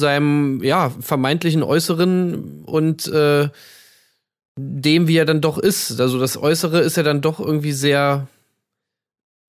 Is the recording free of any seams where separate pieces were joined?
yes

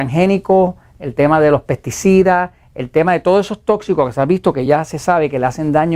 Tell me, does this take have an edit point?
no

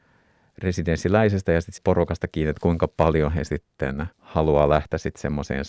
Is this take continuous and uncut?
no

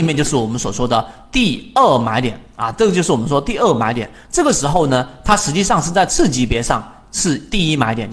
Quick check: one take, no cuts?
yes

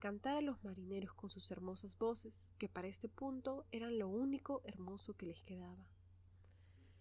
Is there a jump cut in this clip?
no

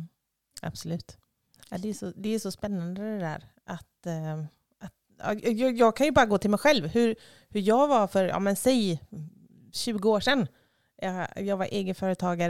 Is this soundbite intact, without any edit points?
yes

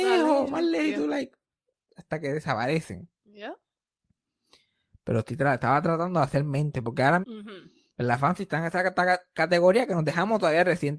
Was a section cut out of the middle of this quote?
yes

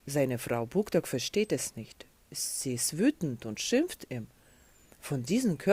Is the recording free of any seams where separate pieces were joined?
yes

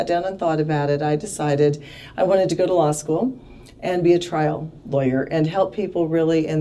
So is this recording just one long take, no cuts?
yes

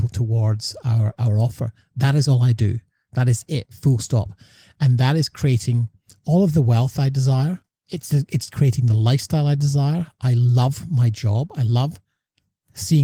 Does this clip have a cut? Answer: yes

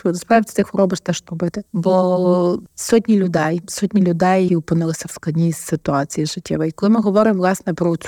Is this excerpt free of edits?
no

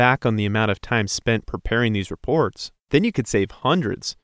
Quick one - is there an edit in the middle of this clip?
no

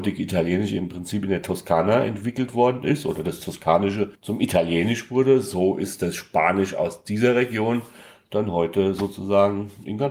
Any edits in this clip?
no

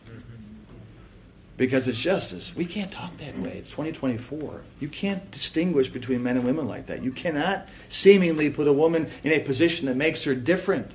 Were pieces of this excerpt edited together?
yes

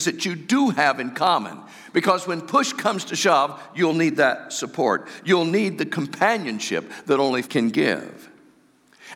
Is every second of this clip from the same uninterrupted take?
no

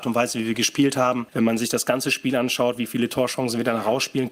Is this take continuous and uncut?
yes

